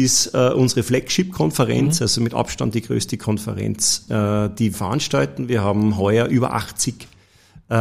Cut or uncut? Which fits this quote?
cut